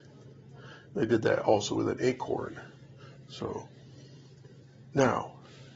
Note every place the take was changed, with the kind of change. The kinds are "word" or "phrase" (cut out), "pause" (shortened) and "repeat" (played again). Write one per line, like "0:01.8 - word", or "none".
none